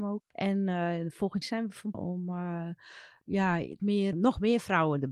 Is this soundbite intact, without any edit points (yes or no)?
no